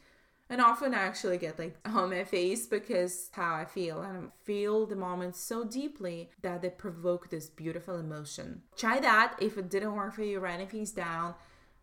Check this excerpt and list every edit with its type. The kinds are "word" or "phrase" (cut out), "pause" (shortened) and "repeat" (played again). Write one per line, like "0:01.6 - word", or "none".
0:01.8 - word
0:03.3 - word
0:06.3 - pause
0:08.7 - pause